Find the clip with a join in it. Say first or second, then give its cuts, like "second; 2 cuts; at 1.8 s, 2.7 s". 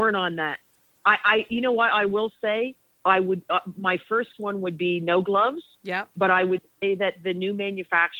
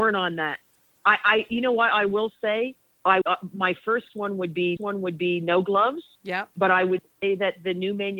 second; 2 cuts; at 3.2 s, 4.8 s